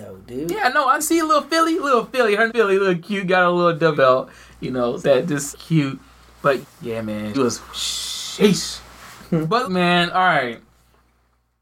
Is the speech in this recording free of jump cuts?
no; 8 cuts; at 1.0 s, 2.5 s, 3.9 s, 5.0 s, 5.5 s, 6.6 s, 7.3 s, 9.6 s

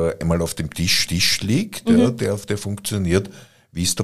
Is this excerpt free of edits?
no; 1 cut; at 1.1 s

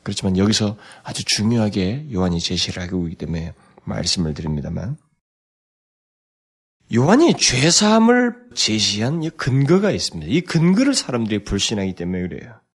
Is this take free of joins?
no; 1 cut; at 8.5 s

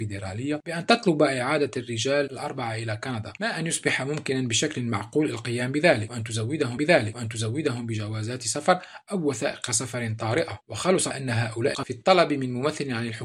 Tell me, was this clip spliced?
yes; 3 cuts; at 6.8 s, 11.1 s, 11.7 s

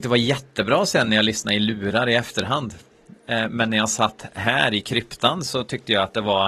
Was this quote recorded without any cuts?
yes; 0 cuts

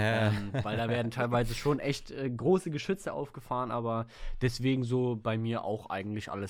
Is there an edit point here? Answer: no; 0 cuts

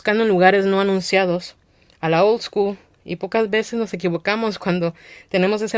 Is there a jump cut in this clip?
no; 0 cuts

